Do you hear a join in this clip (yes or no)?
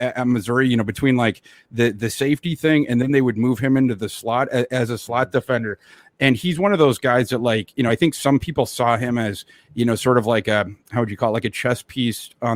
no